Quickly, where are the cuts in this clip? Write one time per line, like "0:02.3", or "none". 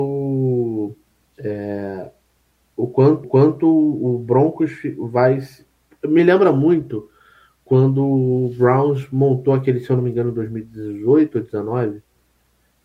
0:03.2